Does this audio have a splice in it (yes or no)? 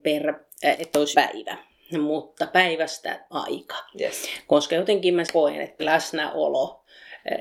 yes